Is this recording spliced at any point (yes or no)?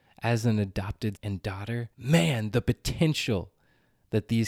yes